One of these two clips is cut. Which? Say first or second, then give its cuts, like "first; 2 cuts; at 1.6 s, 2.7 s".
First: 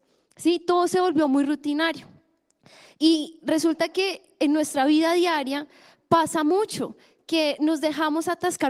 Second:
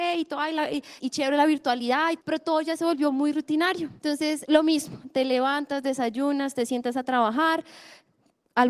second; 3 cuts; at 1.0 s, 2.2 s, 4.0 s